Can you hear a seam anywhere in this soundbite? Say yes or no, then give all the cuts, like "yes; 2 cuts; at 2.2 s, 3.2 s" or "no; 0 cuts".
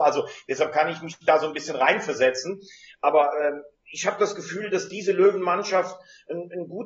no; 0 cuts